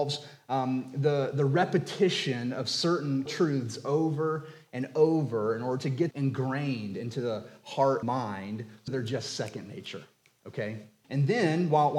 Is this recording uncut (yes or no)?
no